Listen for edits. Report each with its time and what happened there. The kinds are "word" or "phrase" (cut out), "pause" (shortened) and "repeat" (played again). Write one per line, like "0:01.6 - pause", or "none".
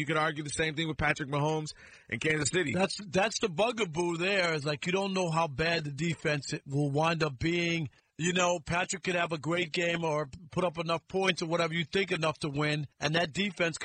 0:08.0 - pause
0:12.9 - pause